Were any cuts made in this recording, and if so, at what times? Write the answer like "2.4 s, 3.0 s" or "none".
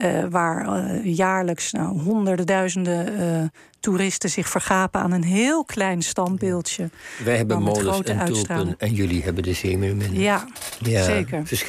none